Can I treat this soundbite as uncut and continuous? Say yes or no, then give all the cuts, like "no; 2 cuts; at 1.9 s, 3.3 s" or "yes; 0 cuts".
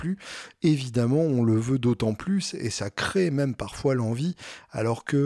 yes; 0 cuts